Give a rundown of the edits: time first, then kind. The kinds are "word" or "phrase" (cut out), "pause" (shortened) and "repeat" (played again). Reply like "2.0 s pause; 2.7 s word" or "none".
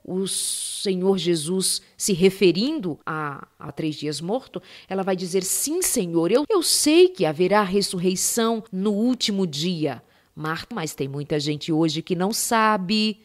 3.0 s pause; 3.7 s phrase; 6.4 s word; 8.7 s pause; 10.7 s word

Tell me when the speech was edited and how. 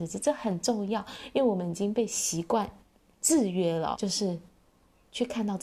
3.9 s word

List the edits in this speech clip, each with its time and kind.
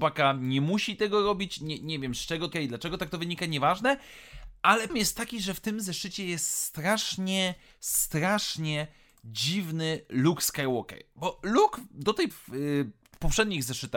2.5 s word; 4.9 s word; 12.3 s word

